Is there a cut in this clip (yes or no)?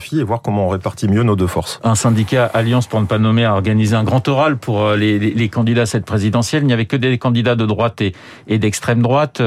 no